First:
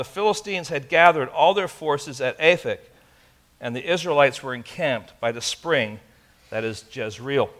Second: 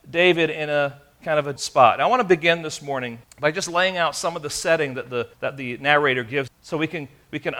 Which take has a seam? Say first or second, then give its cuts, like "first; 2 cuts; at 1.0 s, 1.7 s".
second; 4 cuts; at 1.6 s, 3.2 s, 5.3 s, 6.5 s